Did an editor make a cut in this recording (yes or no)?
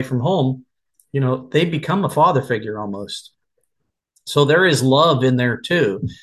no